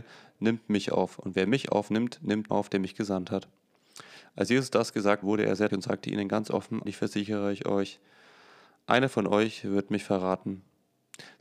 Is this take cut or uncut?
cut